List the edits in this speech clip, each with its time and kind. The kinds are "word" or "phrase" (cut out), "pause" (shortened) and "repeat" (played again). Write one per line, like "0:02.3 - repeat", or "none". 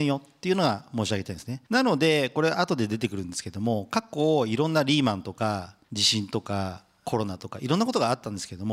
0:01.7 - pause
0:05.8 - pause